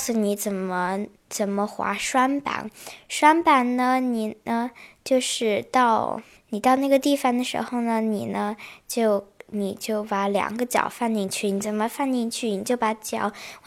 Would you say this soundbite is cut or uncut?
uncut